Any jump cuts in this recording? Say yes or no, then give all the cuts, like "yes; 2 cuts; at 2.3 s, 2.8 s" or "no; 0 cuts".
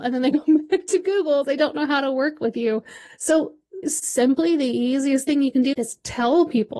yes; 3 cuts; at 1.4 s, 3.8 s, 5.7 s